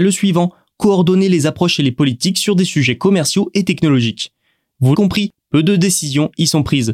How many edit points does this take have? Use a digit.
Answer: 1